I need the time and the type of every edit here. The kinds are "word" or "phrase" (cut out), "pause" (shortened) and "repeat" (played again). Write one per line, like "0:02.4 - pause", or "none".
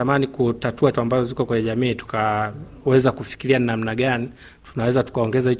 0:00.9 - word